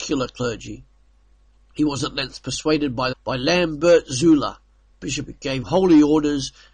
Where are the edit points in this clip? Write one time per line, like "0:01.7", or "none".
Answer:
0:03.1
0:05.3
0:05.6